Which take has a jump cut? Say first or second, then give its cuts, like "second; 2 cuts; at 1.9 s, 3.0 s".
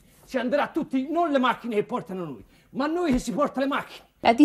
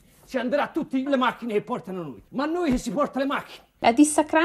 second; 2 cuts; at 1.1 s, 2.3 s